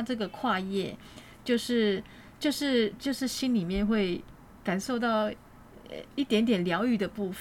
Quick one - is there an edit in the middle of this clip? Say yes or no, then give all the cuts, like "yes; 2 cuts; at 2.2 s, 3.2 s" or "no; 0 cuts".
no; 0 cuts